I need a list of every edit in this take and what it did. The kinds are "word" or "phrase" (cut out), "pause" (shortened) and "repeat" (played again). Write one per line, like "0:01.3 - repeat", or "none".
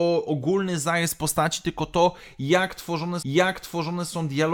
0:03.2 - repeat